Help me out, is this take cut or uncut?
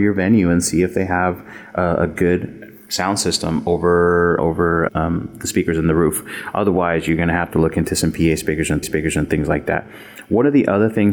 cut